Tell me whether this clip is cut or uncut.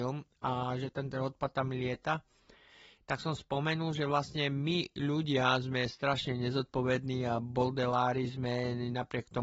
uncut